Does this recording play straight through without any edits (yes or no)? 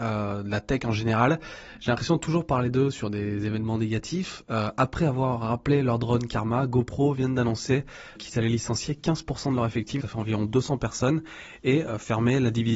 no